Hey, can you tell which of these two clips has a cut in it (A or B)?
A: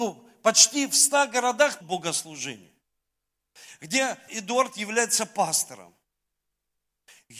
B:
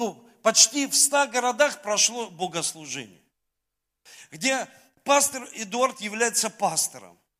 A